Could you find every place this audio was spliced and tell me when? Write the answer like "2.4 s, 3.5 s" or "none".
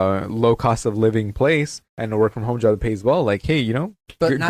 1.9 s